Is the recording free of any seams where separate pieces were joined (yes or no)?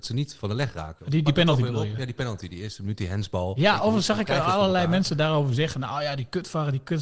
no